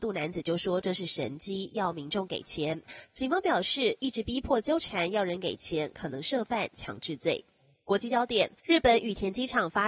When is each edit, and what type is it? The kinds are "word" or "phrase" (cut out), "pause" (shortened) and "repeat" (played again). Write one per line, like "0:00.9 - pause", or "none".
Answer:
0:08.6 - pause